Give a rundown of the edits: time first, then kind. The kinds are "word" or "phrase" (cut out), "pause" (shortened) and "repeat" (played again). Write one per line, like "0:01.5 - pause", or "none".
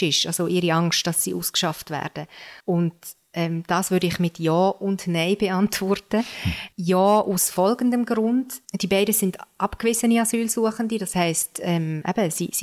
0:02.6 - pause
0:06.7 - pause
0:08.6 - pause